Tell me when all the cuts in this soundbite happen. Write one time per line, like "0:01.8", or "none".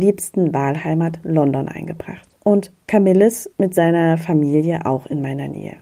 0:03.5